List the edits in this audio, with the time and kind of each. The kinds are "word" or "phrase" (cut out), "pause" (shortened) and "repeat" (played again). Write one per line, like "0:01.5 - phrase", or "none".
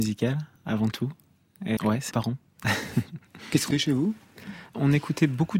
0:01.8 - word
0:02.1 - word
0:03.7 - word